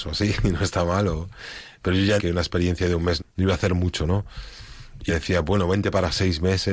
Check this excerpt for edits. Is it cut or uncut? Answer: cut